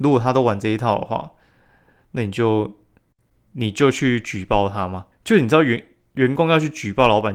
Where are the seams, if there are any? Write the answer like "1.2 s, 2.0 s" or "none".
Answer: 5.1 s